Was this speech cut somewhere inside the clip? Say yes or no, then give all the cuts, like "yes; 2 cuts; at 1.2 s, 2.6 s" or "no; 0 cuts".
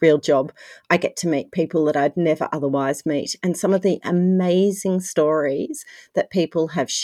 no; 0 cuts